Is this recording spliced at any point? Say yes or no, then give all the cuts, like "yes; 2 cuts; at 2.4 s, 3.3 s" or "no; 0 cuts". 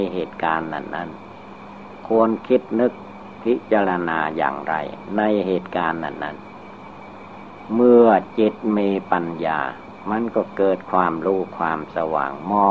no; 0 cuts